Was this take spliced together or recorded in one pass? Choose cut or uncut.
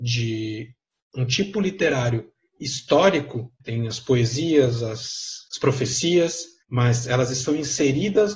cut